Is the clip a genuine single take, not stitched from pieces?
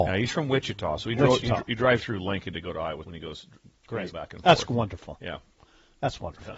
no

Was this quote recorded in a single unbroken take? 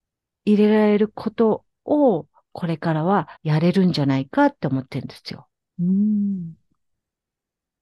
no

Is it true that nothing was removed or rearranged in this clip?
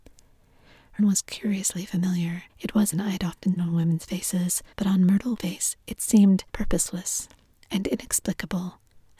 no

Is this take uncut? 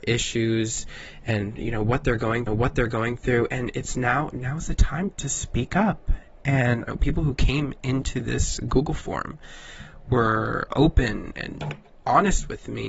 no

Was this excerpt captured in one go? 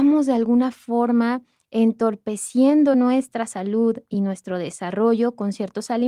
yes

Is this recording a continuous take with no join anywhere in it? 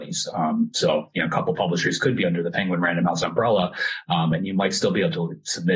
yes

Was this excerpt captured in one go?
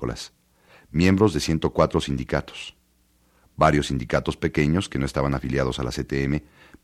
yes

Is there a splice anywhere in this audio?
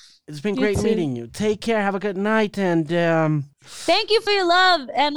yes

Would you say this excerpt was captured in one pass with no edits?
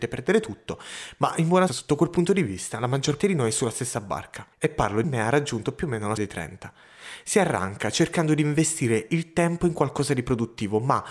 no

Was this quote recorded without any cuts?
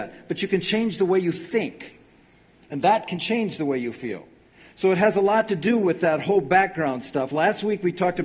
yes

